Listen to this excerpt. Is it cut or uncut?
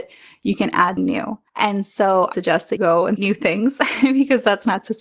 cut